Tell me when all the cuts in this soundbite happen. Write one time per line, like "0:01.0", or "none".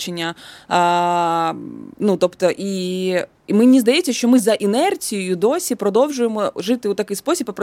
0:01.9